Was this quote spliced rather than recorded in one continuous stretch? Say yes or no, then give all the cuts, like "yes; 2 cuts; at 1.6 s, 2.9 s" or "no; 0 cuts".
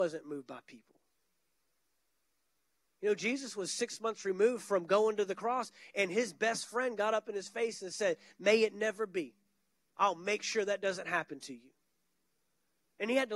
no; 0 cuts